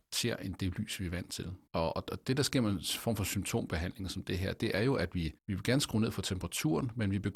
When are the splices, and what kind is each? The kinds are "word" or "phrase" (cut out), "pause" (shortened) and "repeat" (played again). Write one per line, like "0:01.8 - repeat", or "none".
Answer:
0:01.7 - pause
0:05.4 - pause